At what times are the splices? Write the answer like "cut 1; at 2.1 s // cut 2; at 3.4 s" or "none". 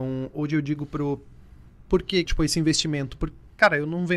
cut 1; at 1.8 s // cut 2; at 2.3 s